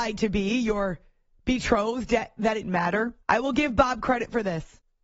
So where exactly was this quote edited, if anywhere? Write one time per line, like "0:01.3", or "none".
0:01.3
0:02.6
0:03.2